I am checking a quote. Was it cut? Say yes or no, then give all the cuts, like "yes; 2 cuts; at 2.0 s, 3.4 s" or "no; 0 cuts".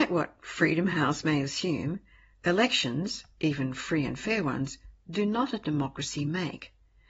no; 0 cuts